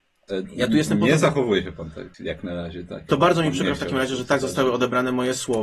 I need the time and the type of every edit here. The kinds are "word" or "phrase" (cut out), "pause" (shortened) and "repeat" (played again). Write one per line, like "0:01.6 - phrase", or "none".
0:02.1 - pause